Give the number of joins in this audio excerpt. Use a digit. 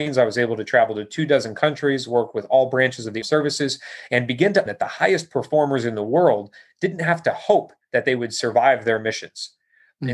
2